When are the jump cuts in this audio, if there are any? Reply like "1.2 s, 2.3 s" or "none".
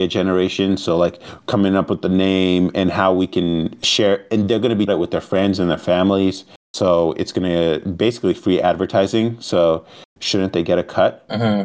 4.9 s

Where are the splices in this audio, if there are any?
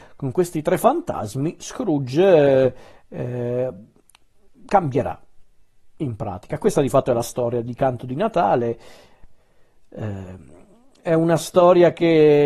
none

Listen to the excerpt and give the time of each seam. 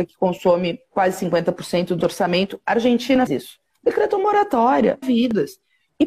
2.0 s, 3.3 s, 5.0 s

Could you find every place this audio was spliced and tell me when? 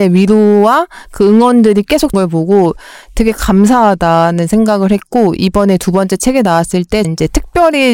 2.1 s, 7.0 s

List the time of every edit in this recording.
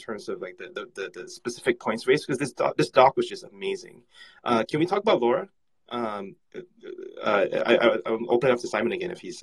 none

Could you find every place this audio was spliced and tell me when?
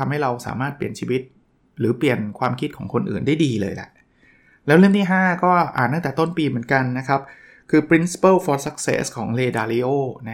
none

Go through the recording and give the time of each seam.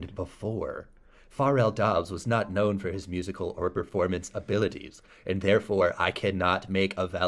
none

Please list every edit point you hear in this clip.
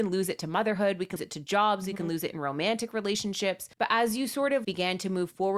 1.2 s, 3.7 s, 4.6 s

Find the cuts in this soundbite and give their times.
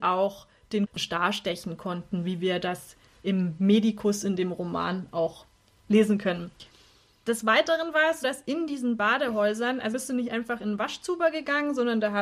8.2 s, 9.9 s

